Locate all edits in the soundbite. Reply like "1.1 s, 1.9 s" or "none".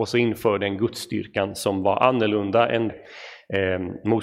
2.9 s

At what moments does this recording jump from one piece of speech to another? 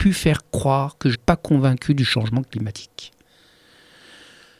1.1 s

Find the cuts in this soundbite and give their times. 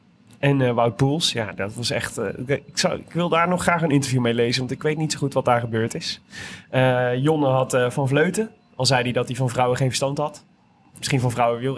none

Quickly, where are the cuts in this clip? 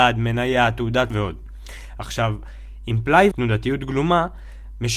1.1 s, 3.3 s

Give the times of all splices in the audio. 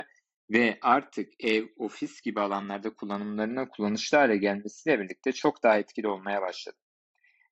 none

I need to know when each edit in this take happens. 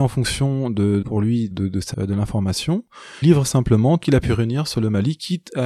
1.0 s, 1.5 s, 1.9 s, 3.2 s, 4.0 s

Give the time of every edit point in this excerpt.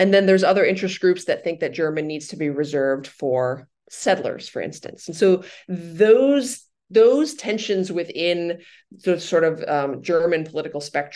none

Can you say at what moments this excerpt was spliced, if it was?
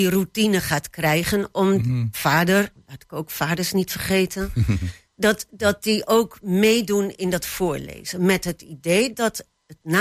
none

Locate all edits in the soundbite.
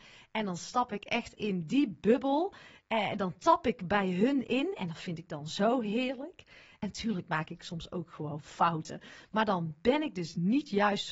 1.4 s

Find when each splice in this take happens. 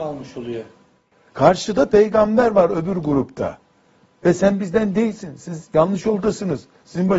none

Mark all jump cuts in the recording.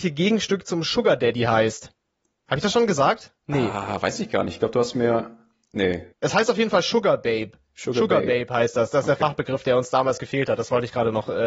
6.1 s

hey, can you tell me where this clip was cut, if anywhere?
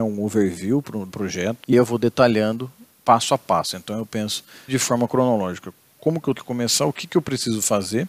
1.1 s, 1.7 s, 4.7 s, 6.4 s

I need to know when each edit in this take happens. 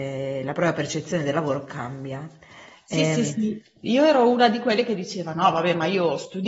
none

